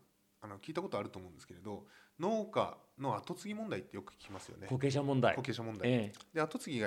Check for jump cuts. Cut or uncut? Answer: uncut